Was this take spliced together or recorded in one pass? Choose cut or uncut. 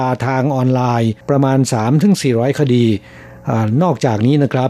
cut